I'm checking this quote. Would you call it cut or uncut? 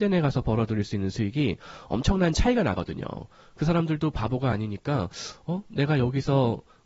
uncut